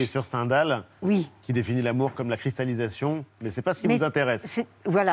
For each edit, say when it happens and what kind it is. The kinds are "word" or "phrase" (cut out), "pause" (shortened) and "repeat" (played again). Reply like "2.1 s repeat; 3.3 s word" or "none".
none